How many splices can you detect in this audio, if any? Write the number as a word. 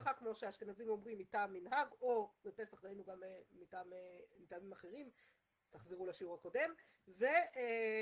zero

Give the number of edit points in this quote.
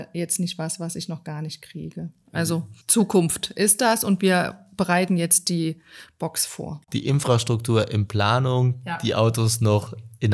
one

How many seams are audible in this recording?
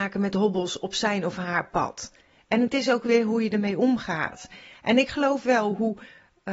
zero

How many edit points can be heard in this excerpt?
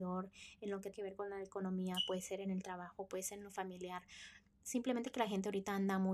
one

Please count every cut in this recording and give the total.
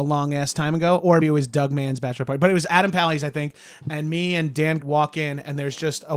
three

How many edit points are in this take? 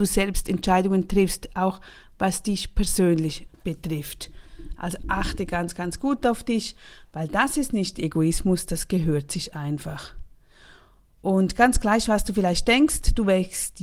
zero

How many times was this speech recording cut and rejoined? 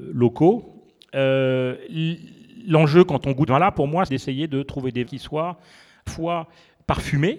four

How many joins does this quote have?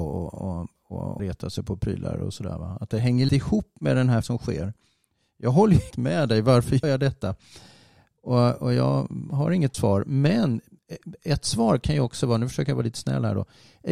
six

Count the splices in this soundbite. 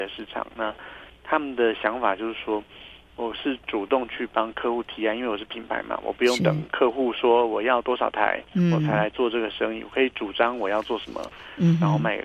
one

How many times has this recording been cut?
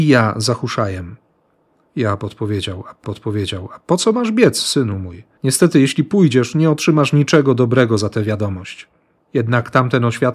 two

